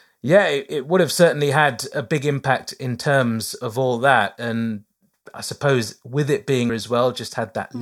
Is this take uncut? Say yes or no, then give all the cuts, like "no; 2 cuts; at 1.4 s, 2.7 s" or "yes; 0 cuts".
no; 1 cut; at 6.7 s